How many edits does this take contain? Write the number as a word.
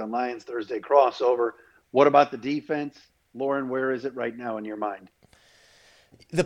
zero